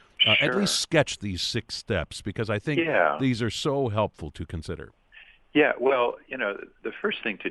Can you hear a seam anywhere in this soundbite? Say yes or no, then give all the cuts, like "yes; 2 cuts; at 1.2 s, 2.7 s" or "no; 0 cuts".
no; 0 cuts